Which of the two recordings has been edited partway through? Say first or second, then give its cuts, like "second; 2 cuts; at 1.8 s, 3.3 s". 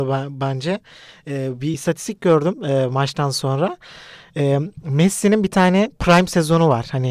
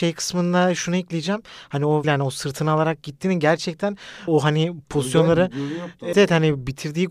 second; 3 cuts; at 2.0 s, 4.3 s, 6.1 s